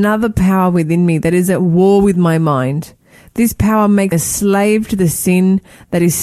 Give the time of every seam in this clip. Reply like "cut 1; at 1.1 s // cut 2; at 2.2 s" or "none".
cut 1; at 4.1 s